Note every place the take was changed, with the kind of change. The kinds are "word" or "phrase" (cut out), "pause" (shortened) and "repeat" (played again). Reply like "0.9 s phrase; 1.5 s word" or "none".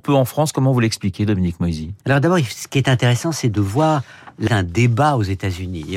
2.0 s pause; 4.5 s word

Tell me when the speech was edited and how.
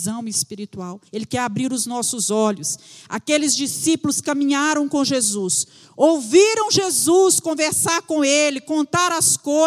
1.1 s pause

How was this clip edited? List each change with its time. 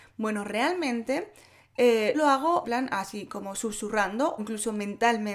2.1 s word; 2.6 s word; 4.4 s word

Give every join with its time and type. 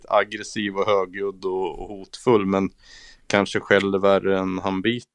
none

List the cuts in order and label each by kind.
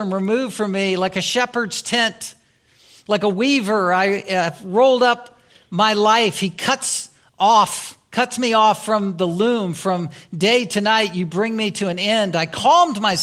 none

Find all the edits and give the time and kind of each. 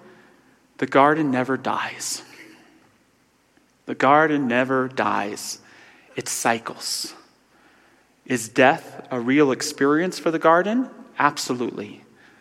none

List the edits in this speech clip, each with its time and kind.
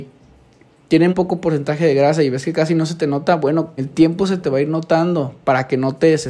1.1 s word; 3.8 s word

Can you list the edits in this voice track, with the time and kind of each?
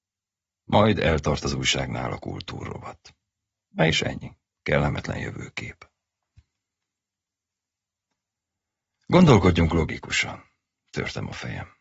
4.5 s pause

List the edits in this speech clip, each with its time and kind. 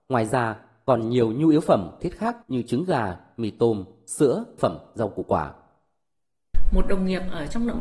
2.0 s word; 2.4 s pause; 4.6 s word

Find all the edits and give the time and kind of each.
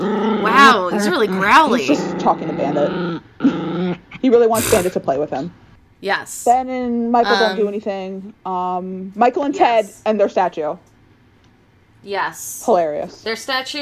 none

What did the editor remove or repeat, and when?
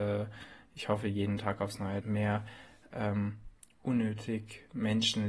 2.0 s phrase

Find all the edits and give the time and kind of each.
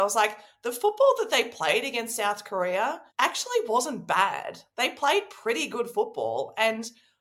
3.1 s pause

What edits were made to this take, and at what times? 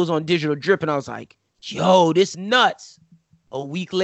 1.5 s pause; 2.3 s word

